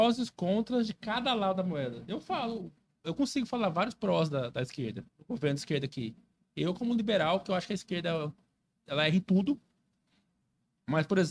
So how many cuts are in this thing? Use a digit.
1